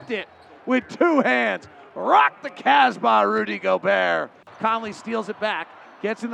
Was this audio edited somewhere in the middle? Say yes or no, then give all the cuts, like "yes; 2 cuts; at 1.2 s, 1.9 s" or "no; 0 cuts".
no; 0 cuts